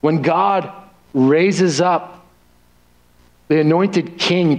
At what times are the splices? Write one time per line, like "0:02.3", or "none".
none